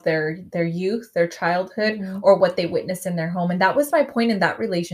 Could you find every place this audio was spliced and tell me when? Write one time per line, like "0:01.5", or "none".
none